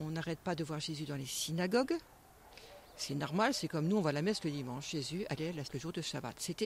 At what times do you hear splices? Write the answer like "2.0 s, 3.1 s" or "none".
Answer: 5.6 s

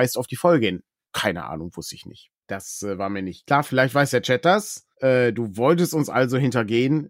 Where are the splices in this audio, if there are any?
2.4 s, 4.9 s

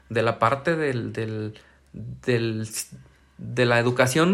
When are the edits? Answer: none

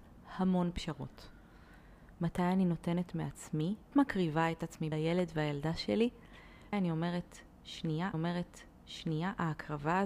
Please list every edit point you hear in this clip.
3.9 s, 4.9 s, 6.7 s, 8.1 s

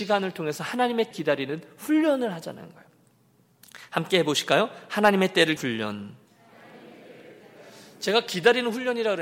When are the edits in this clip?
1.1 s, 5.6 s

